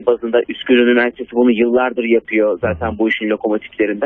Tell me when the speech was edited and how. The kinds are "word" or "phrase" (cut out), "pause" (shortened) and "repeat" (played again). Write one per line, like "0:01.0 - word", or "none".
none